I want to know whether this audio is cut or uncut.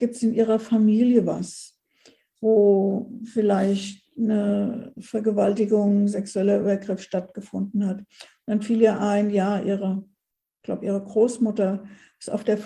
uncut